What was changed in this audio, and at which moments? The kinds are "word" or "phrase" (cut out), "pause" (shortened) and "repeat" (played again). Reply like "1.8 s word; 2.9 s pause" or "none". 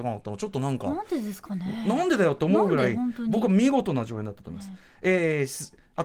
none